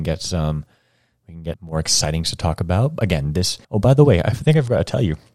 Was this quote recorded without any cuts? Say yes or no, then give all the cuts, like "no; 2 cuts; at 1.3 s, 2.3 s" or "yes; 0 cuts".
no; 3 cuts; at 1.5 s, 2.2 s, 3.6 s